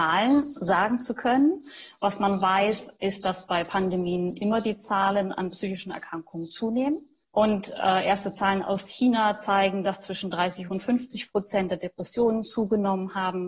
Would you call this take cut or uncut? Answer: uncut